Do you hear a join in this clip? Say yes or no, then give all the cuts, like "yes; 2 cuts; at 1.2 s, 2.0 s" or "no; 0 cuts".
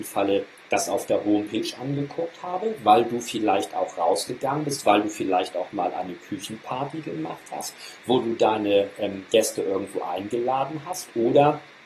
no; 0 cuts